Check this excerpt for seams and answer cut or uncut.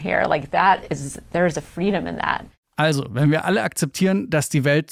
uncut